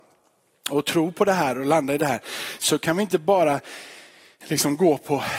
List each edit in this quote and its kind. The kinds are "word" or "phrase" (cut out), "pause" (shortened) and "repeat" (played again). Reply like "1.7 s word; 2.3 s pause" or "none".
none